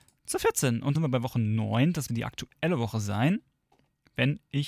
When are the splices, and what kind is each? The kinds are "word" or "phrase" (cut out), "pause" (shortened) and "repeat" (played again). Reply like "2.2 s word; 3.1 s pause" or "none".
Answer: 0.9 s word; 2.1 s word